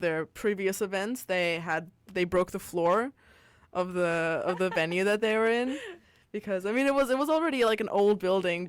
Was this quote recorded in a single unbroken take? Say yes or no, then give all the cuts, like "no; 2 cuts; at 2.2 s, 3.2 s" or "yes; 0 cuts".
yes; 0 cuts